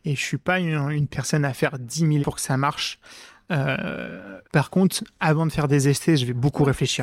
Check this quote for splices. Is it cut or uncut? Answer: cut